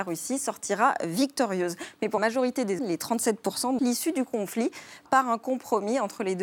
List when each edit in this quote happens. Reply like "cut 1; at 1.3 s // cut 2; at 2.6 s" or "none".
cut 1; at 2.2 s // cut 2; at 2.8 s // cut 3; at 3.8 s // cut 4; at 5.1 s

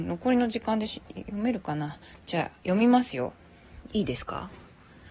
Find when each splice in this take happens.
cut 1; at 2.1 s // cut 2; at 2.6 s

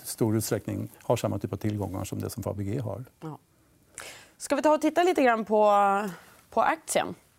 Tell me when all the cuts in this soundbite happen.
cut 1; at 0.9 s

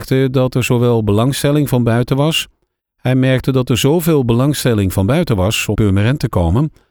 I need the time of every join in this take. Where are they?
cut 1; at 5.7 s

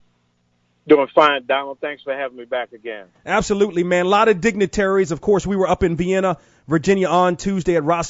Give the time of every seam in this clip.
none

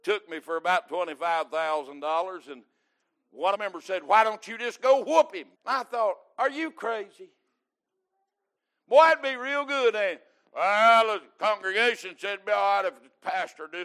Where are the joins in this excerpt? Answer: cut 1; at 3.5 s // cut 2; at 5.5 s

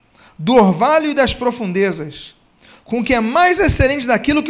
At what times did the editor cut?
none

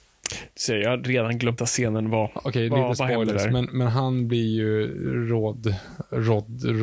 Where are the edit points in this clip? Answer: cut 1; at 1.6 s

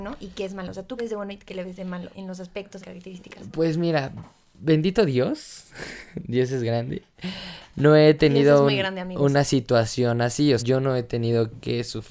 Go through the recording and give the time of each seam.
cut 1; at 1.0 s // cut 2; at 2.1 s // cut 3; at 2.8 s // cut 4; at 10.6 s

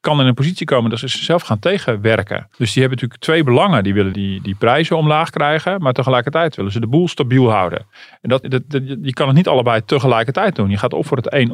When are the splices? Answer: cut 1; at 2.5 s // cut 2; at 4.1 s // cut 3; at 8.4 s

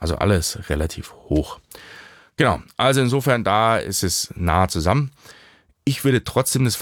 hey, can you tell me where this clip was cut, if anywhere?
none

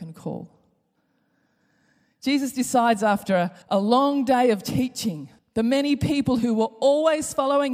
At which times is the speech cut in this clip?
cut 1; at 3.6 s // cut 2; at 5.4 s

